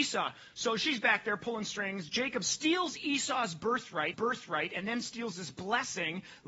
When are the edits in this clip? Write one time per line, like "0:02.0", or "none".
0:04.1